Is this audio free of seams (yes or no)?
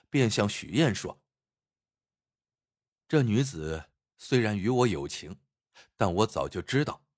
yes